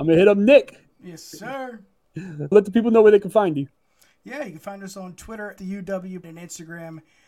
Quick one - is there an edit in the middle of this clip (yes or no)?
yes